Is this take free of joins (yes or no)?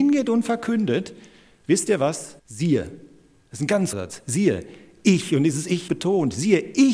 no